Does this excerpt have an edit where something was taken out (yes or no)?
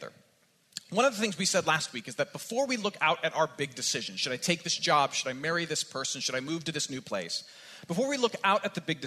no